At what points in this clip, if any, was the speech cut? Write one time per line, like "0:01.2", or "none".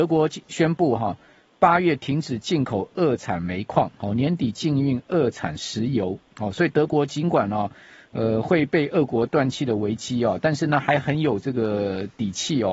none